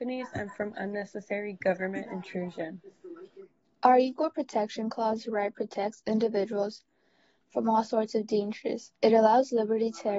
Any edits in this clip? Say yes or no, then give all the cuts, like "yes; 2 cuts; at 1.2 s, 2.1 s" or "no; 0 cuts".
no; 0 cuts